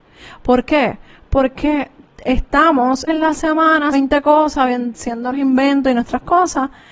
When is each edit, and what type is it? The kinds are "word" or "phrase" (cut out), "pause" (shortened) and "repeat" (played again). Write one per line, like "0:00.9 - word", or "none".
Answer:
0:03.1 - word
0:03.9 - word
0:05.3 - word

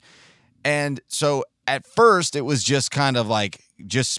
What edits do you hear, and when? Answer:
none

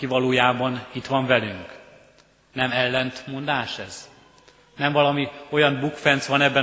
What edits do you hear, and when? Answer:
none

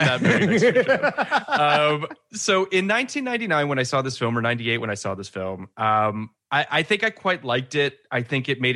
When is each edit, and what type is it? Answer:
none

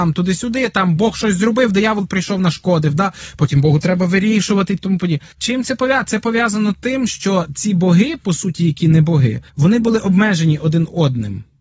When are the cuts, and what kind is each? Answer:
0:04.8 - phrase
0:05.3 - pause
0:09.5 - pause

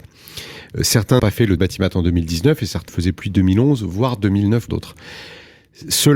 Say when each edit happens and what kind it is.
0:01.2 - word
0:01.6 - word
0:02.9 - phrase
0:03.2 - phrase
0:04.7 - word

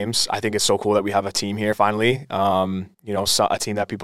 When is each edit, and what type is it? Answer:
0:02.9 - pause

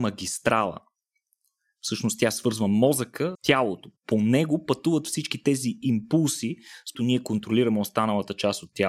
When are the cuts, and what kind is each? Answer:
0:03.3 - word
0:06.9 - phrase

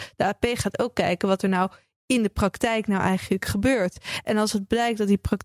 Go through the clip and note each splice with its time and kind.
none

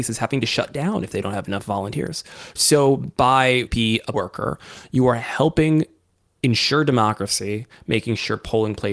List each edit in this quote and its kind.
0:03.7 - phrase
0:04.1 - word

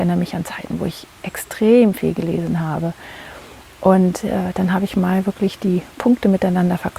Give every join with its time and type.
none

